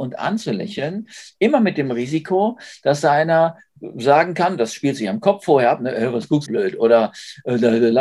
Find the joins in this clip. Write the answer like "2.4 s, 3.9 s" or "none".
6.5 s